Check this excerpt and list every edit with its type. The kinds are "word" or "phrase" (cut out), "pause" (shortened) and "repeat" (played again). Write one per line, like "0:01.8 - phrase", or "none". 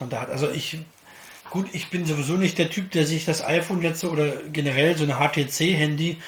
0:01.4 - pause